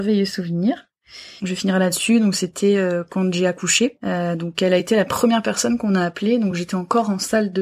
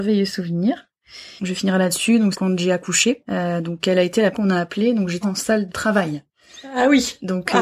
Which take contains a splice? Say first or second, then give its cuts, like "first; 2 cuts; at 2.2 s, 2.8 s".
second; 4 cuts; at 2.3 s, 4.3 s, 5.2 s, 5.7 s